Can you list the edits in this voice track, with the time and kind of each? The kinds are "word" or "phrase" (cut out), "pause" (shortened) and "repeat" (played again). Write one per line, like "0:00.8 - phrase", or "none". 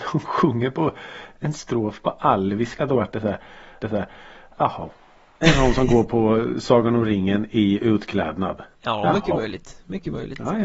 0:03.8 - repeat
0:08.7 - pause